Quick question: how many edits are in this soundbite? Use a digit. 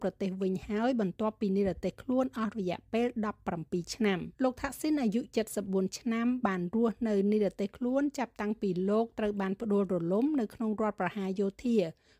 1